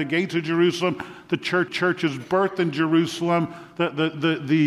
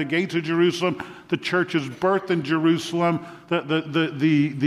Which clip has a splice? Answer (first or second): first